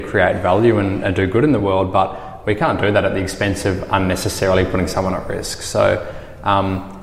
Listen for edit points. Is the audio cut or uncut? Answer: uncut